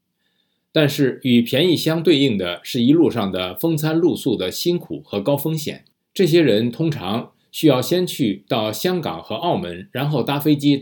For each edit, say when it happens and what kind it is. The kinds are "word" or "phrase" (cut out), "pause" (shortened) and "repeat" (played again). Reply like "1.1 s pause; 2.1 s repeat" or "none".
6.0 s pause